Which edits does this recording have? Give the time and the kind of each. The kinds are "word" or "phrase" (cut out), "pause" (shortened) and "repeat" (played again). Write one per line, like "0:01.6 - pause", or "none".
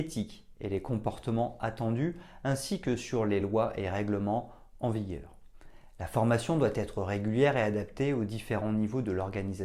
none